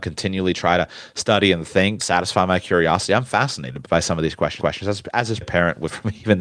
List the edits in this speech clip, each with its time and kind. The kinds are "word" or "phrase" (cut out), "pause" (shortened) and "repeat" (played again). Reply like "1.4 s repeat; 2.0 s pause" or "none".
2.0 s phrase; 3.8 s word; 4.6 s repeat; 5.4 s word